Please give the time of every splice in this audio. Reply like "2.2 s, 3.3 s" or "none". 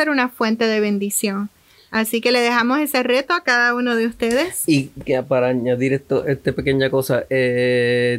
none